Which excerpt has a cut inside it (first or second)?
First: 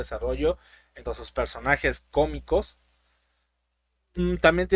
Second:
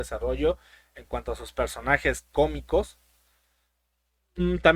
first